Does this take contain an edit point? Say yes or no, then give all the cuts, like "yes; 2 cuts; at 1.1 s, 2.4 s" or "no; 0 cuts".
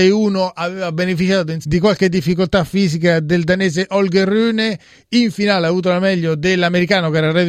yes; 1 cut; at 1.6 s